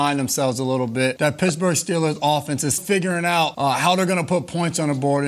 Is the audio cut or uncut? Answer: cut